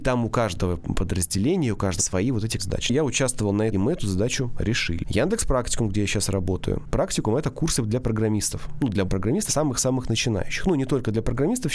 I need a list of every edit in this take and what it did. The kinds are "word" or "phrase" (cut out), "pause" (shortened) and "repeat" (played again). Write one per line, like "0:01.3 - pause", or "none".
0:02.0 - word
0:02.6 - word
0:03.7 - phrase
0:09.1 - word
0:09.5 - word